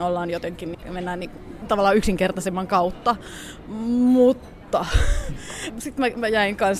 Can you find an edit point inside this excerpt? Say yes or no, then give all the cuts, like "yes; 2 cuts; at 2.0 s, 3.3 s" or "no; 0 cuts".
no; 0 cuts